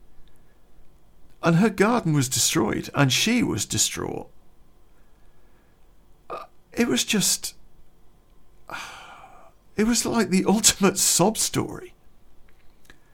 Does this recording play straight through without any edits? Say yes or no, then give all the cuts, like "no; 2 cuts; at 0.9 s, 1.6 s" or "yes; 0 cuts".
yes; 0 cuts